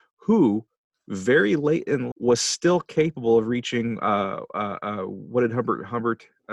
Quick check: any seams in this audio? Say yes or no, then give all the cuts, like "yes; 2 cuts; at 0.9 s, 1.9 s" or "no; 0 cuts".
yes; 1 cut; at 2.1 s